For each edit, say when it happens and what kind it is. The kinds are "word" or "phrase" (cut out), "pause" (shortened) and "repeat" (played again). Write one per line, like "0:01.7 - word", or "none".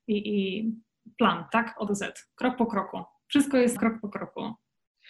0:01.5 - word
0:01.9 - word
0:03.8 - word